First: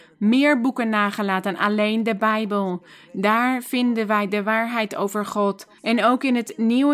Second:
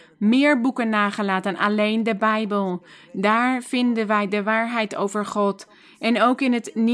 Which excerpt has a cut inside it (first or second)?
first